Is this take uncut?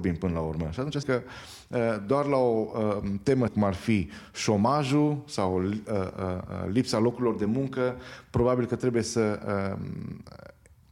no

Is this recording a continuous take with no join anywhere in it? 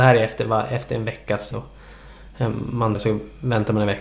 no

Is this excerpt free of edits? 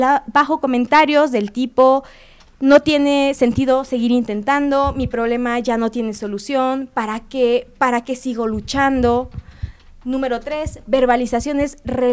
yes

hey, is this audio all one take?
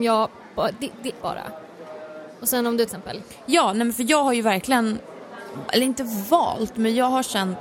no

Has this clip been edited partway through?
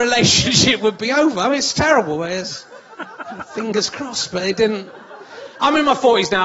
no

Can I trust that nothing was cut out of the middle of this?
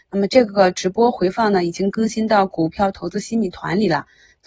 yes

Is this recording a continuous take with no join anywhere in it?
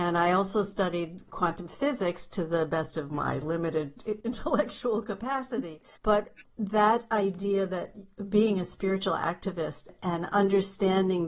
yes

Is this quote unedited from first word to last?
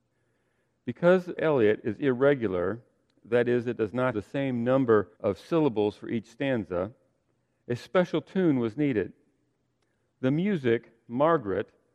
no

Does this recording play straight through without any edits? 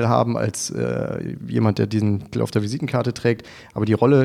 no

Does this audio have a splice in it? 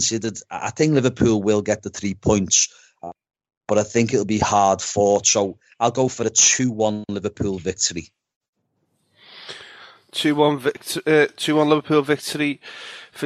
no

